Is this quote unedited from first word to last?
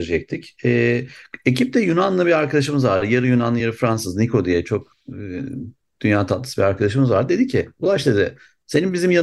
yes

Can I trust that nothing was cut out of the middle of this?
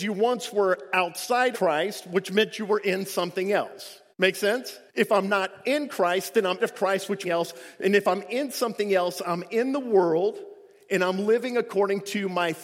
no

